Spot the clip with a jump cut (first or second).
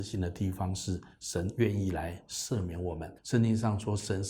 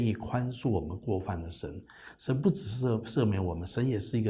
first